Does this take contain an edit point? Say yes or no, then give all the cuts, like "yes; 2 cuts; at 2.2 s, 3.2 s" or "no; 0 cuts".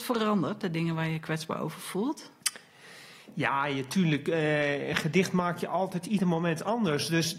no; 0 cuts